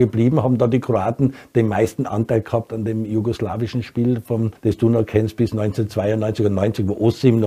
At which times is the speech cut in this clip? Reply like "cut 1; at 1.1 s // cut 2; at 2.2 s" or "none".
cut 1; at 4.6 s